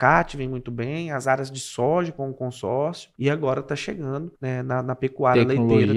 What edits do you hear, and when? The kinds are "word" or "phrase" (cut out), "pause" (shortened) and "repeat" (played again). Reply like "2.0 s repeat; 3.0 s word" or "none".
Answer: 3.1 s pause; 4.3 s pause